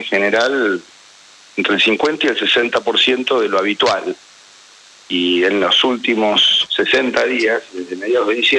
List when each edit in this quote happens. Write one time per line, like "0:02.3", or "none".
none